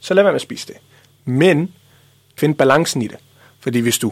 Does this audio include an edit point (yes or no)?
yes